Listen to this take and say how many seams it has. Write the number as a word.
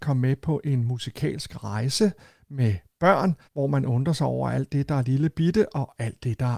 one